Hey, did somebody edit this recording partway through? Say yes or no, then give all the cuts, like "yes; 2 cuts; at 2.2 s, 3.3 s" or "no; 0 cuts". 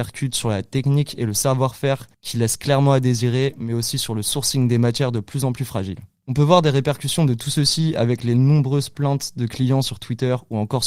no; 0 cuts